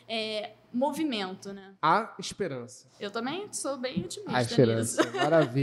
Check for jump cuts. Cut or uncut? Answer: cut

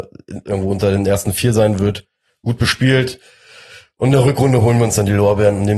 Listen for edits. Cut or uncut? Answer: uncut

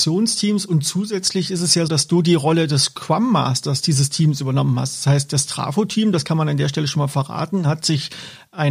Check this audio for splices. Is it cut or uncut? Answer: cut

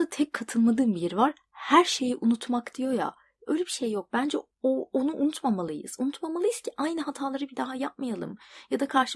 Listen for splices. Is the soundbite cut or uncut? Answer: uncut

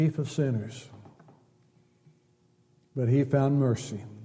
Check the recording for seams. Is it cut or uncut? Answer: uncut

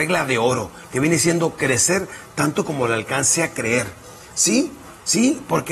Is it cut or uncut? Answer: uncut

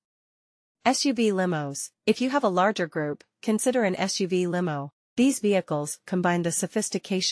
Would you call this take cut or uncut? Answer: uncut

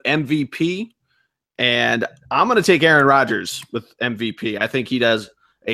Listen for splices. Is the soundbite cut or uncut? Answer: uncut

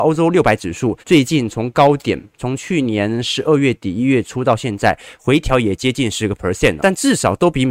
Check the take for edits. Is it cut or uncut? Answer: cut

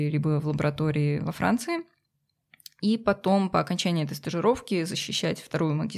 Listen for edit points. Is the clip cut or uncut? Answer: uncut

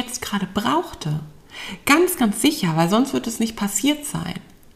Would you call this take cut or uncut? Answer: uncut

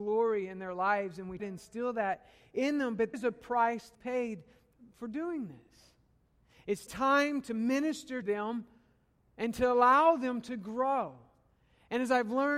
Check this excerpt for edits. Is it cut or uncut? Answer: cut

